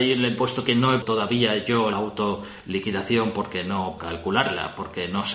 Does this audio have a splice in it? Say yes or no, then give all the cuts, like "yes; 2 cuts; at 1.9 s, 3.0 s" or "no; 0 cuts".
yes; 3 cuts; at 1.0 s, 1.9 s, 4.0 s